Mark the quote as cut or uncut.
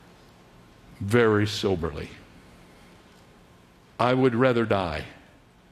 uncut